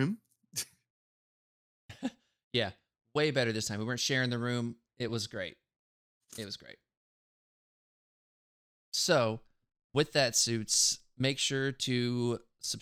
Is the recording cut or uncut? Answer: uncut